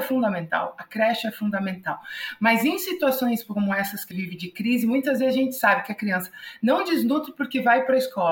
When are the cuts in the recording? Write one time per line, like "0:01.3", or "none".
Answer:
0:04.1